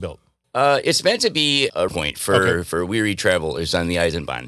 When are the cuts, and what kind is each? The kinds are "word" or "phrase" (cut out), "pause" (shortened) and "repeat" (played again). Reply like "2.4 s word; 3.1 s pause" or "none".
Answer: 1.9 s word